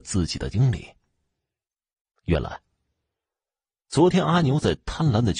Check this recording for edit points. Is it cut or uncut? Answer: uncut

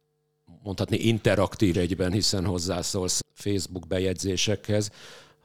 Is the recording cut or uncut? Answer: cut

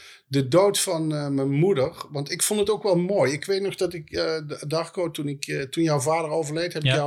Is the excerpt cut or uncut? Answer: uncut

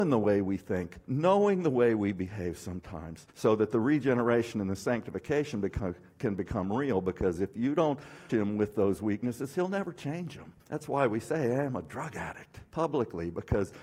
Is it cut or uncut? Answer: cut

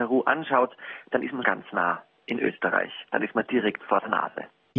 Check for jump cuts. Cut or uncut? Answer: cut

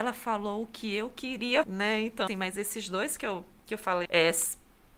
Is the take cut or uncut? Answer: cut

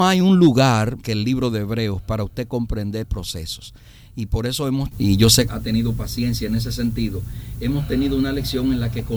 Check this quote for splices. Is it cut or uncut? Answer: cut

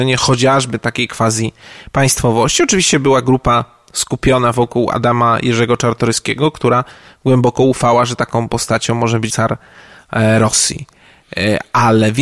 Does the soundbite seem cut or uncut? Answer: uncut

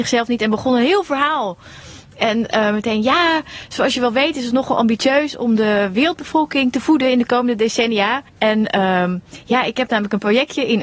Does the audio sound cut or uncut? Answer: cut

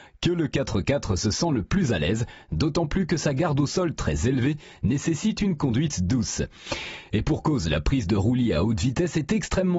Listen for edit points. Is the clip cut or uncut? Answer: uncut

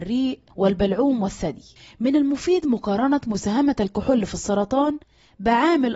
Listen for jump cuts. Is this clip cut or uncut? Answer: uncut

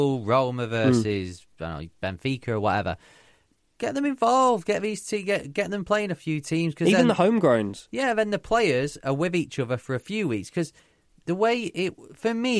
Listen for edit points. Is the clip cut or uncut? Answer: uncut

